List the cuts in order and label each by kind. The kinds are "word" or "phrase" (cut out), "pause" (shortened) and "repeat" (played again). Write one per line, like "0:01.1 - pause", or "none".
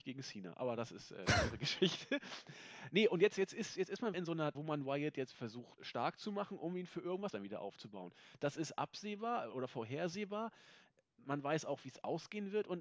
0:04.1 - word
0:04.5 - word
0:05.3 - word
0:05.8 - word
0:07.3 - word
0:09.5 - word